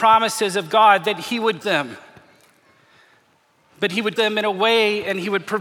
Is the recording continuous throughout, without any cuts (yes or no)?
no